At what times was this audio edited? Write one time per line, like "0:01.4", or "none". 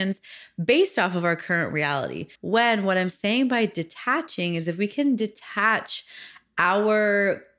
0:02.3